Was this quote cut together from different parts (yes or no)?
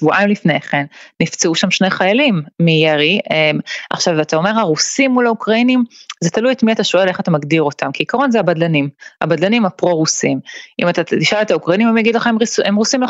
no